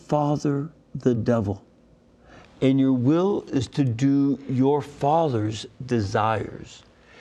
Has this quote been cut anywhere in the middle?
no; 0 cuts

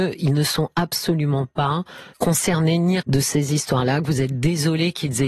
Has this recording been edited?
yes; 2 cuts; at 2.1 s, 3.0 s

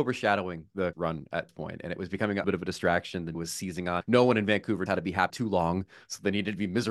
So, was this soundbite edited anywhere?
yes; 7 cuts; at 0.9 s, 1.5 s, 2.4 s, 3.3 s, 4.0 s, 4.9 s, 5.3 s

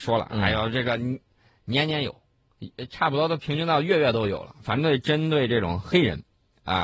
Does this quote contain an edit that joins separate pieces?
no; 0 cuts

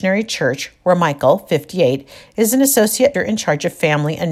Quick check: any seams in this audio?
yes; 1 cut; at 3.1 s

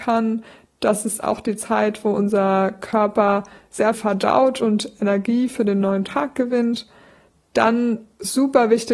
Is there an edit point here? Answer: yes; 1 cut; at 3.9 s

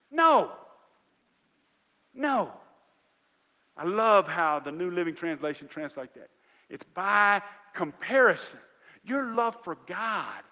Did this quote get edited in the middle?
no; 0 cuts

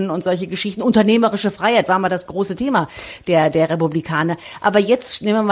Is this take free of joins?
yes; 0 cuts

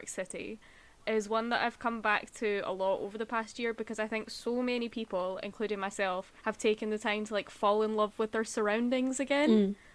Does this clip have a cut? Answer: yes; 1 cut; at 6.4 s

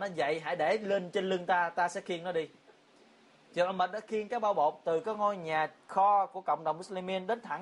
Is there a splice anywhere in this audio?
no; 0 cuts

